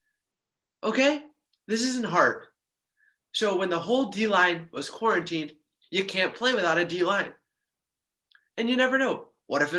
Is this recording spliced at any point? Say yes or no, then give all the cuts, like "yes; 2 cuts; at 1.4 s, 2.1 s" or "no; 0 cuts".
no; 0 cuts